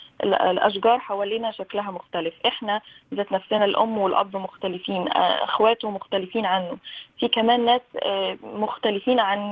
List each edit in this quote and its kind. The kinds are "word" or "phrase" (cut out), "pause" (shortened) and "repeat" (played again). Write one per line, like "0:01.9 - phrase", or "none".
none